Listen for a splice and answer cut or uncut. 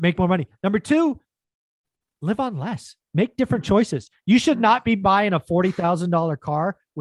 uncut